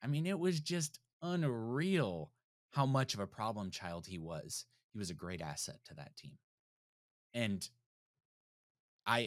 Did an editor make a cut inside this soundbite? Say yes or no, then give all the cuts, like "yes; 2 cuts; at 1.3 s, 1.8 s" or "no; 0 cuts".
no; 0 cuts